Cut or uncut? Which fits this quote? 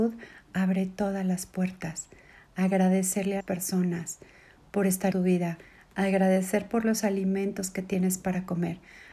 cut